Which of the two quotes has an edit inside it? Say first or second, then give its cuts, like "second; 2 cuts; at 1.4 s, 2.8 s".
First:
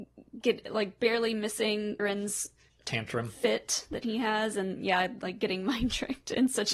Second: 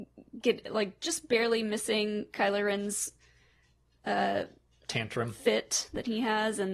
first; 3 cuts; at 1.0 s, 2.0 s, 2.7 s